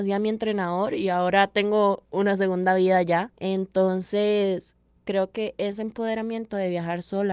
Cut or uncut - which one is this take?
uncut